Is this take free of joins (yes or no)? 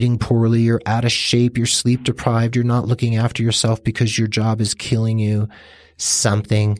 yes